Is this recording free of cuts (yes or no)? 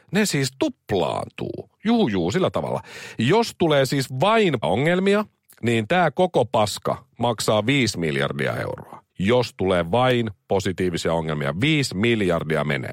no